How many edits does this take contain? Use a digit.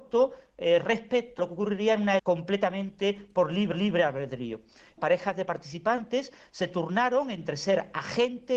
4